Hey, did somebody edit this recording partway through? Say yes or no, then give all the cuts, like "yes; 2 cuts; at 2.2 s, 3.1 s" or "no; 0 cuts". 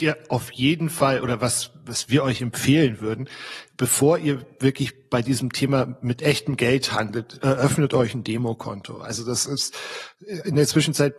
no; 0 cuts